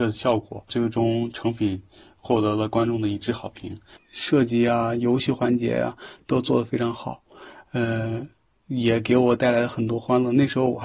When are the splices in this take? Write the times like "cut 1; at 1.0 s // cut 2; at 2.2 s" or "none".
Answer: none